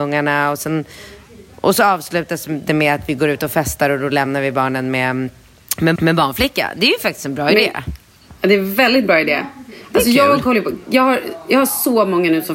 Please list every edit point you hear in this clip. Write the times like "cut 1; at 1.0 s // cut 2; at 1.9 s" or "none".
cut 1; at 6.0 s

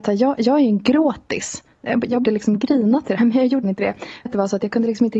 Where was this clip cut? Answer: cut 1; at 2.2 s // cut 2; at 3.2 s // cut 3; at 3.6 s // cut 4; at 4.3 s

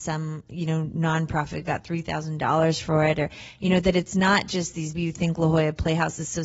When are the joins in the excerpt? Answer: cut 1; at 4.9 s

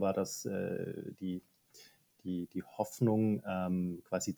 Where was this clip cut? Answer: none

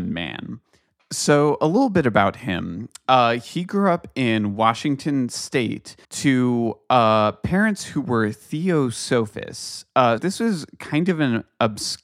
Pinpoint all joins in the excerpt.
cut 1; at 6.0 s // cut 2; at 10.2 s

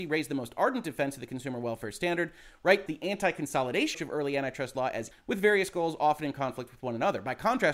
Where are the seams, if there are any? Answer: cut 1; at 2.9 s // cut 2; at 3.9 s // cut 3; at 5.1 s

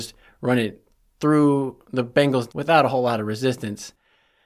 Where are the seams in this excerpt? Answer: cut 1; at 1.8 s // cut 2; at 2.5 s

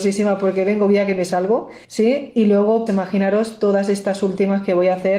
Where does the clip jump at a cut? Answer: cut 1; at 1.8 s // cut 2; at 2.9 s

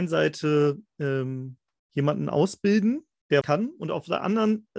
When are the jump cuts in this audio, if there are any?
cut 1; at 3.4 s

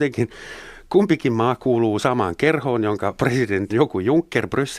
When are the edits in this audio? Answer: cut 1; at 3.7 s

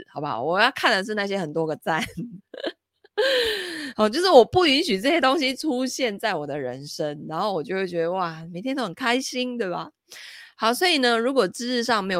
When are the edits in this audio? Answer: none

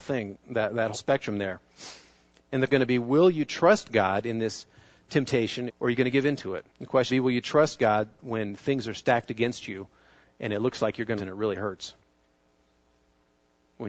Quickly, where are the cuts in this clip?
cut 1; at 0.9 s // cut 2; at 2.7 s // cut 3; at 5.7 s // cut 4; at 6.7 s // cut 5; at 7.1 s // cut 6; at 11.2 s

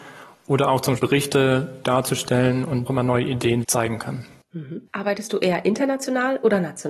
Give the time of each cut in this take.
cut 1; at 1.0 s // cut 2; at 1.8 s // cut 3; at 2.9 s // cut 4; at 3.6 s // cut 5; at 4.9 s

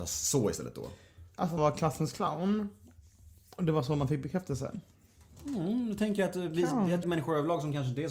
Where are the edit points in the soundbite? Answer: cut 1; at 1.6 s // cut 2; at 7.0 s

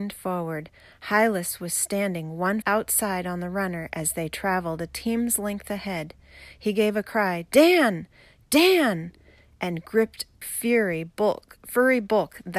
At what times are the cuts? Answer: cut 1; at 2.6 s // cut 2; at 10.4 s

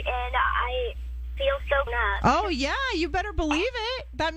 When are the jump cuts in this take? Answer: cut 1; at 1.4 s // cut 2; at 1.9 s

